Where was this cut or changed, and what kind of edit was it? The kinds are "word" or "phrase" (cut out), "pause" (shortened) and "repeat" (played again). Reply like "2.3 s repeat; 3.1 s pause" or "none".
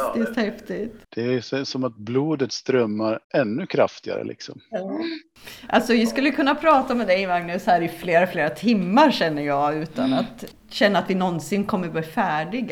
1.0 s pause; 3.2 s pause; 10.5 s word